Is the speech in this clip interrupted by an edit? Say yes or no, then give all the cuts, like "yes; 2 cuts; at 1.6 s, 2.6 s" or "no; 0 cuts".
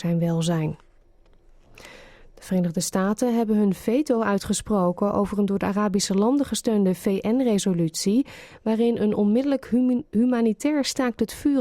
no; 0 cuts